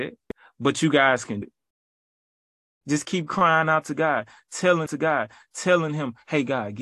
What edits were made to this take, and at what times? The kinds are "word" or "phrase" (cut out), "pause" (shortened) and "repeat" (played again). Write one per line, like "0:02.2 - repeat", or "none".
0:01.4 - word
0:04.9 - repeat